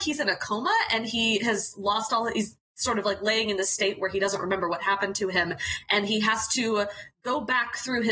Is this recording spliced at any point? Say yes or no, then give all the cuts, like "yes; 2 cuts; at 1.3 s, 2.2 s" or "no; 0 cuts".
no; 0 cuts